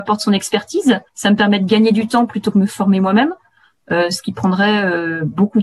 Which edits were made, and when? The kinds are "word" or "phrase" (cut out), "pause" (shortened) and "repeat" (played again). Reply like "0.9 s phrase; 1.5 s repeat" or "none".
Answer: 1.1 s pause